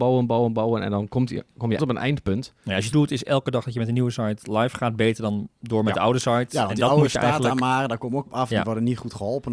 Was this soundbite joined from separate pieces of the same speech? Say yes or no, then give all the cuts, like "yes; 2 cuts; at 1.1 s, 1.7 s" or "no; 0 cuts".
yes; 3 cuts; at 1.8 s, 2.9 s, 8.3 s